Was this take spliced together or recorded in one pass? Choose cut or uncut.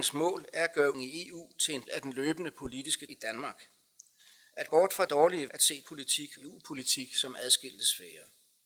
cut